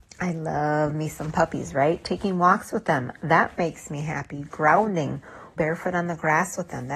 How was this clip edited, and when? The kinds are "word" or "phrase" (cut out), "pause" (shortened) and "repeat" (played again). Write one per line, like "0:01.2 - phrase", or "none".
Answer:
0:05.6 - word